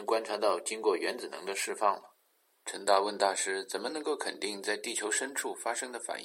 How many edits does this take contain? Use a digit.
1